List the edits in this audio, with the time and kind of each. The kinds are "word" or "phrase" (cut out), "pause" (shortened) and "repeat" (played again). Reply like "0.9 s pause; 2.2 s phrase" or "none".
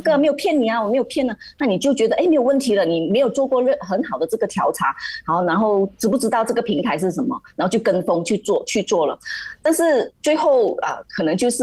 10.1 s pause